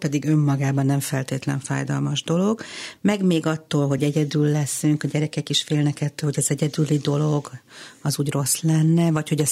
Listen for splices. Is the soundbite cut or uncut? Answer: uncut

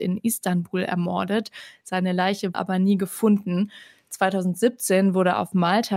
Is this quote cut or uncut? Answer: cut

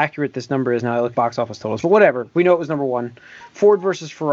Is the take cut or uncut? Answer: cut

